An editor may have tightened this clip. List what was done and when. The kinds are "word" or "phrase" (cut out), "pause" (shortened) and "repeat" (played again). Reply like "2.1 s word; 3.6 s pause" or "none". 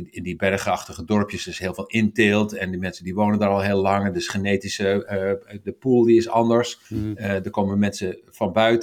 6.9 s pause

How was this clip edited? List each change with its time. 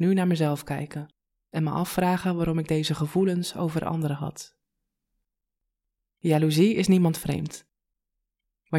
none

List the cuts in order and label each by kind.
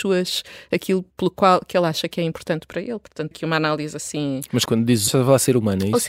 1.1 s pause; 3.3 s word; 4.6 s word; 5.1 s word

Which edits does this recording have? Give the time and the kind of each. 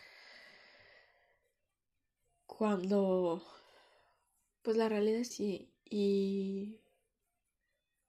5.3 s word

